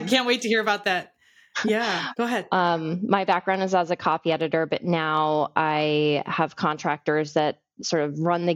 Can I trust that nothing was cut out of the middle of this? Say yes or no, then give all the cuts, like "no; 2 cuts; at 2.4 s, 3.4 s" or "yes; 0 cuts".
yes; 0 cuts